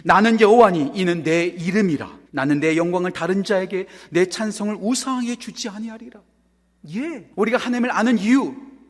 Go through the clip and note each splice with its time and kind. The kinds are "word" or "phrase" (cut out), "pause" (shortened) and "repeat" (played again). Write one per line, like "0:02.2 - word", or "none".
0:02.3 - pause
0:07.3 - pause